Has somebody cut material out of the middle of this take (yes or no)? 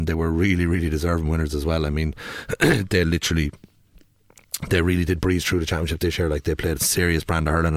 no